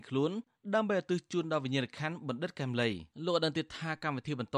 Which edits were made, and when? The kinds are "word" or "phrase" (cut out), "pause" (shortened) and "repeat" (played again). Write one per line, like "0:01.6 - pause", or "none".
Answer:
0:03.1 - pause